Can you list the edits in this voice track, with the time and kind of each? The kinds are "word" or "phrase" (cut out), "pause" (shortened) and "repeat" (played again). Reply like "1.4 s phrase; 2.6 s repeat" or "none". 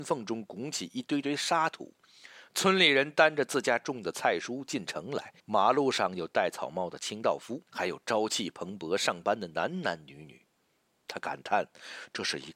5.4 s pause; 7.6 s pause